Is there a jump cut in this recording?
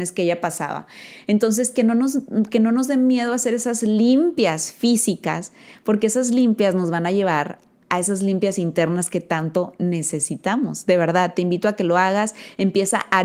no; 0 cuts

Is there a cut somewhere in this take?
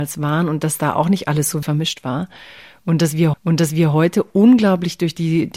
yes; 2 cuts; at 1.6 s, 3.3 s

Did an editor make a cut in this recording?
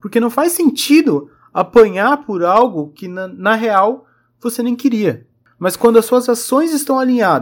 no; 0 cuts

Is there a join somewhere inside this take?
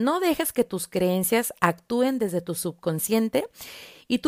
no; 0 cuts

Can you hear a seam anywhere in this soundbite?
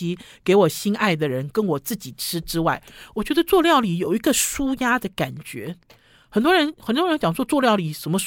no; 0 cuts

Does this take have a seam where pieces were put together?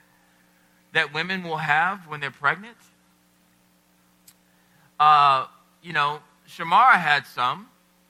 no; 0 cuts

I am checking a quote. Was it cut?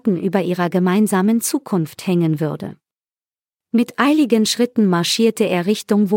no; 0 cuts

